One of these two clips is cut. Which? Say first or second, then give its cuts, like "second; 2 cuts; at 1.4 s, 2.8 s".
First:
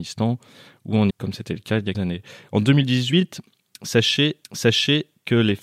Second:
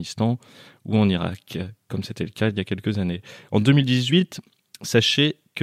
first; 3 cuts; at 1.1 s, 1.9 s, 4.4 s